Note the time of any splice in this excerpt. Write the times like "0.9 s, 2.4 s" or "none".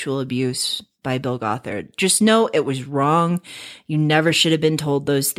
none